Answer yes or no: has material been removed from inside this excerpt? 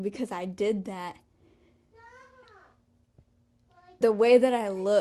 yes